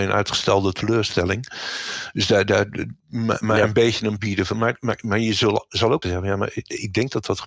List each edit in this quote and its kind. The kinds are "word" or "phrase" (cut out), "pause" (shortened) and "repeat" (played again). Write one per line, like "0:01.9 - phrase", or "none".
0:03.0 - pause
0:04.2 - word
0:06.0 - word